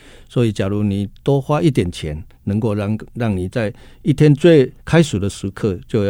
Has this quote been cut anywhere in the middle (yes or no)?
yes